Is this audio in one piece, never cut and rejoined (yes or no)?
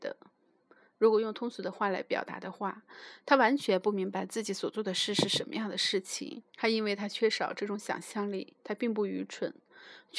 no